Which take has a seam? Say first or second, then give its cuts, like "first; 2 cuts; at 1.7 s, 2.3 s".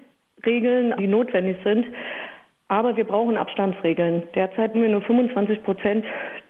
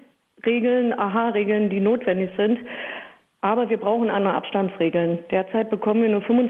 first; 3 cuts; at 1.0 s, 3.4 s, 4.7 s